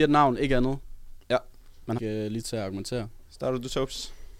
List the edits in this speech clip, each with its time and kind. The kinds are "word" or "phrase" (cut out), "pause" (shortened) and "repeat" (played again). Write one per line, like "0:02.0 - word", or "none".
0:02.0 - word
0:02.4 - word

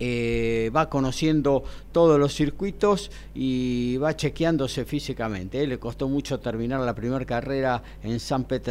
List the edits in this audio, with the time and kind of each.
none

